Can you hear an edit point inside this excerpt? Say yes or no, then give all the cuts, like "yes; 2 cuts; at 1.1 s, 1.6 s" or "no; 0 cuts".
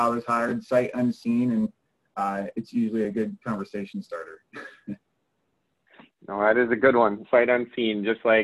no; 0 cuts